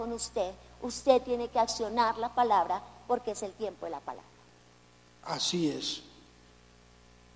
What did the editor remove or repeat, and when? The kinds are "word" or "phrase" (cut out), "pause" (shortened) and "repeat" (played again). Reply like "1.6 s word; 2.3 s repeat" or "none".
none